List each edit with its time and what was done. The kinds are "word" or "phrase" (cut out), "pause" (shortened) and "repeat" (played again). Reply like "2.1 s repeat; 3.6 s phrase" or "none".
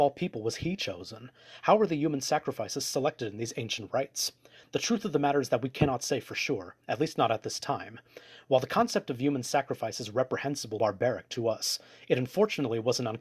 10.8 s word